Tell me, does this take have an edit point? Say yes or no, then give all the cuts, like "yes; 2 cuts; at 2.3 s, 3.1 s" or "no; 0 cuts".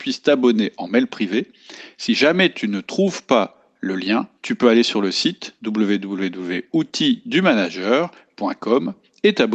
yes; 1 cut; at 4.4 s